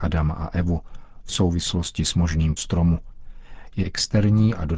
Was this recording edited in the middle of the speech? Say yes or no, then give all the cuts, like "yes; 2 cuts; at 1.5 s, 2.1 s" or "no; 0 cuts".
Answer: yes; 2 cuts; at 2.6 s, 3.8 s